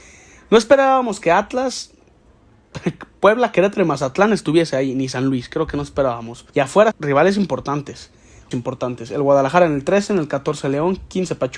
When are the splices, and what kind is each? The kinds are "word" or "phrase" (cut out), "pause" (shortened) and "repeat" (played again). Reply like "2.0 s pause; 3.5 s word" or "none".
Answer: 6.5 s pause; 6.9 s word; 8.5 s phrase